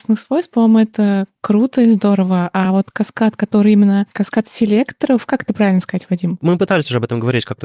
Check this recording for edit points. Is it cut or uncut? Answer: uncut